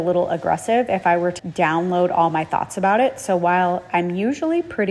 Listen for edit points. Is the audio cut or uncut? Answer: cut